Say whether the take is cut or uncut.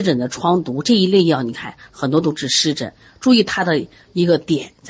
uncut